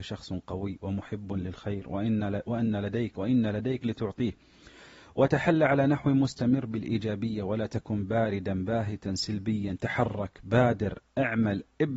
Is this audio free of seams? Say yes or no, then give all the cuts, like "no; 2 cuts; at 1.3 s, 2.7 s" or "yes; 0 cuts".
no; 1 cut; at 3.8 s